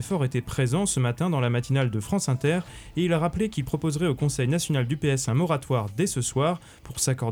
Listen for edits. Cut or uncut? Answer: uncut